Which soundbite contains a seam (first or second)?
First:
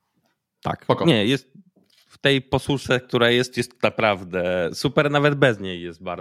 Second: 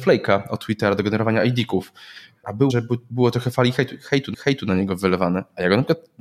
second